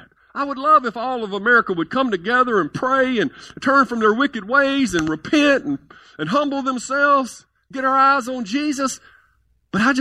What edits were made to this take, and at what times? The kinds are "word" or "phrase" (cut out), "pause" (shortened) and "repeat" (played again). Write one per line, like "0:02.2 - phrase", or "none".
none